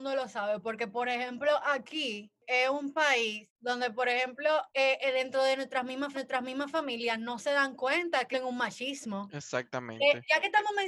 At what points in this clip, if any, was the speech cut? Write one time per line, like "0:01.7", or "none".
0:04.7
0:06.1
0:08.3